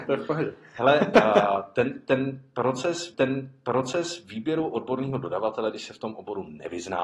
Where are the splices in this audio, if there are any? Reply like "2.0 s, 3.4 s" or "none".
3.1 s